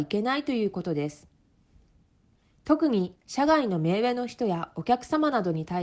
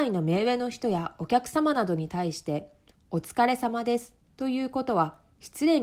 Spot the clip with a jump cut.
first; 1 cut; at 3.2 s

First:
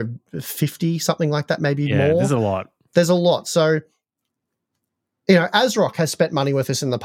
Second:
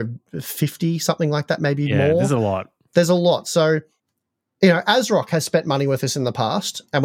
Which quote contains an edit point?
second; 1 cut; at 4.0 s

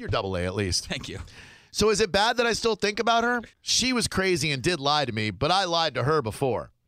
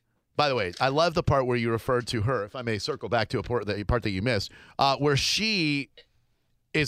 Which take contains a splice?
first; 1 cut; at 3.5 s

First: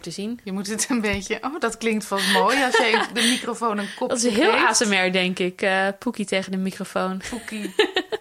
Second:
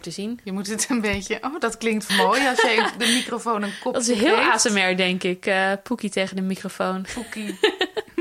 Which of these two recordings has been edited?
second; 1 cut; at 2.1 s

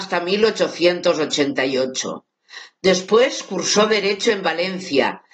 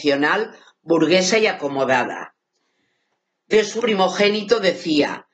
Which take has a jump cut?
second; 1 cut; at 3.8 s

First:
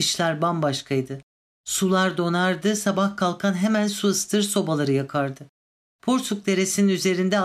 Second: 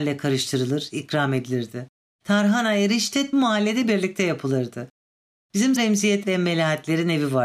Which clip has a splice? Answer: second; 3 cuts; at 3.3 s, 5.8 s, 6.2 s

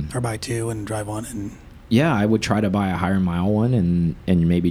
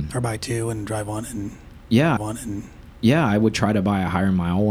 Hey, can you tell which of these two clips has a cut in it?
second; 1 cut; at 2.2 s

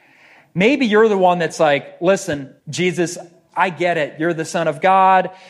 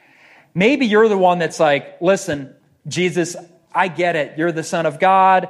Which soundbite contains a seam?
first; 1 cut; at 2.6 s

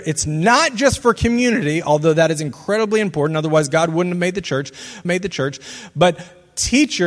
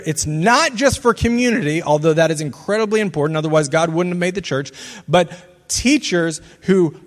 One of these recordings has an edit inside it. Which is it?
first; 1 cut; at 5.0 s

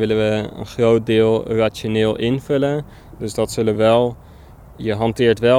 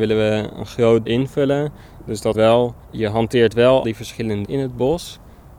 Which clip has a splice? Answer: second; 5 cuts; at 1.1 s, 2.3 s, 2.8 s, 3.8 s, 4.4 s

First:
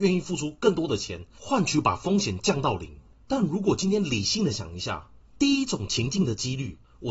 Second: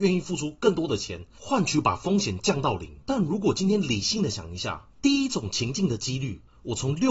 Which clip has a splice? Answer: second; 2 cuts; at 3.0 s, 4.9 s

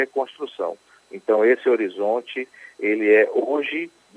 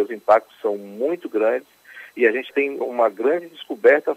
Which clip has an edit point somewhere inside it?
second; 2 cuts; at 2.5 s, 2.8 s

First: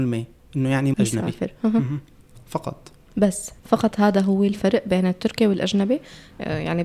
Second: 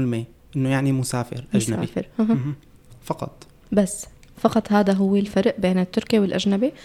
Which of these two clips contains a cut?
first; 2 cuts; at 0.9 s, 3.6 s

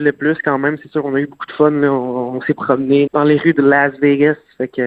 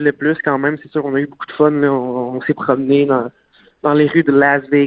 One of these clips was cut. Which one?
first; 1 cut; at 3.1 s

